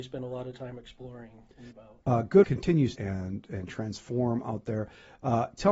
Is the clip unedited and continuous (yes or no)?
no